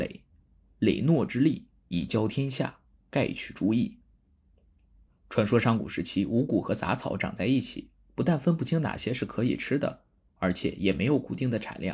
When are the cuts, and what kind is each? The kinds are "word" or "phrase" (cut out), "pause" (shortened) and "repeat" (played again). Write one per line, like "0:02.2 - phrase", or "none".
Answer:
none